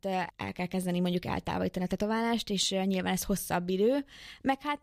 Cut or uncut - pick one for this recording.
uncut